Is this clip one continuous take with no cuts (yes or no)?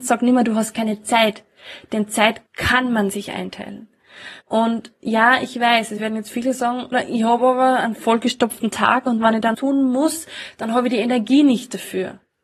no